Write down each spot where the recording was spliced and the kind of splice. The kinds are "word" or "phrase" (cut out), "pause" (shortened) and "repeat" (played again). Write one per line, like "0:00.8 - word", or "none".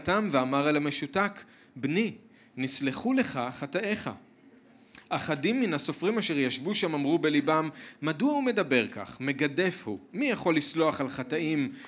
none